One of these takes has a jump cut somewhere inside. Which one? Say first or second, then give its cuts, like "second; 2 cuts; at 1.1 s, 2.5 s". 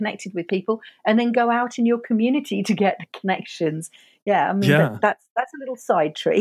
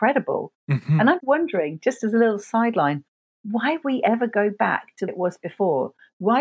second; 3 cuts; at 1.2 s, 3.8 s, 5.1 s